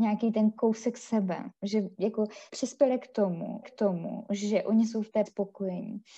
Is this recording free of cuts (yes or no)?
no